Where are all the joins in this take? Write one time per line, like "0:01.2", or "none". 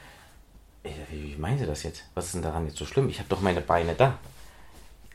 none